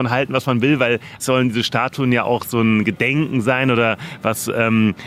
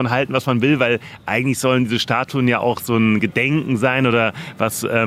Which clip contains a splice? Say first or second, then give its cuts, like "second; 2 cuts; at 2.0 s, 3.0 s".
first; 1 cut; at 1.2 s